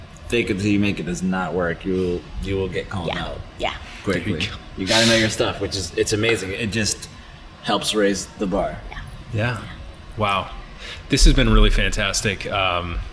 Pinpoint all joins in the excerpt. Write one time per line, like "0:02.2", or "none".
none